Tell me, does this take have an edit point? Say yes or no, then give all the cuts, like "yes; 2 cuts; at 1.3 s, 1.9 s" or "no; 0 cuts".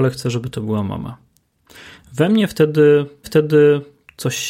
yes; 1 cut; at 3.2 s